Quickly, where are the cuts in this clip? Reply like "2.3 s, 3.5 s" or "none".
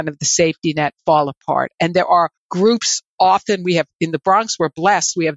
2.4 s